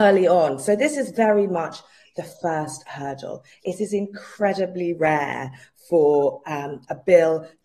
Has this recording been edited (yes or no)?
no